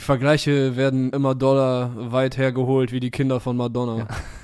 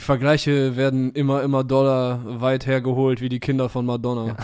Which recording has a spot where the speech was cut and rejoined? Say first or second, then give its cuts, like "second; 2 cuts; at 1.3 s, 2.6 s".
first; 1 cut; at 1.1 s